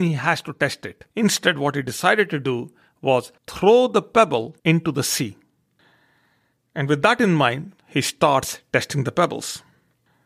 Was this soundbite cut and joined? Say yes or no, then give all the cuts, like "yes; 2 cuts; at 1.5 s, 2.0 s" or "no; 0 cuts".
yes; 4 cuts; at 1.1 s, 3.4 s, 4.6 s, 7.8 s